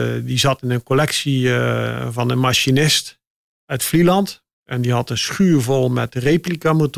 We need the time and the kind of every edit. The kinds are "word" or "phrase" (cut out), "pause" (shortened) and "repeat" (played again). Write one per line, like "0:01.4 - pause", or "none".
0:03.5 - pause
0:04.5 - pause